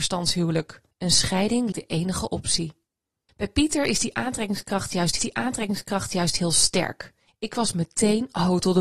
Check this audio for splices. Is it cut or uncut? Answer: cut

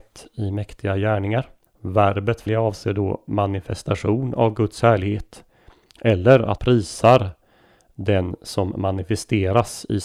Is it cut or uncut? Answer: cut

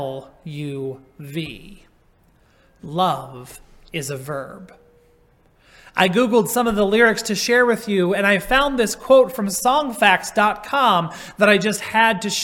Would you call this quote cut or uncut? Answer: uncut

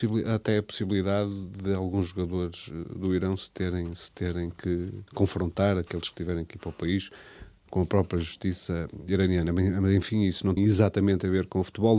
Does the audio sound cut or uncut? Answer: cut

